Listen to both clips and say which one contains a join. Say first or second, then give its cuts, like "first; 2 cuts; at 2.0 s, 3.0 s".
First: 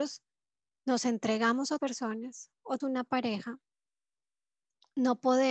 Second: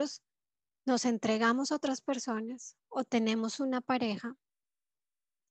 first; 2 cuts; at 1.8 s, 2.8 s